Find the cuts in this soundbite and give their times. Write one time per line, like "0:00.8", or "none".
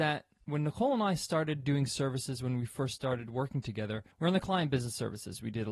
0:04.1